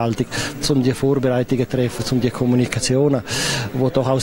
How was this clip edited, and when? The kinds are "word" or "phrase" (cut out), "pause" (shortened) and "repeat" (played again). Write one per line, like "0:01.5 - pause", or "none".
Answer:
none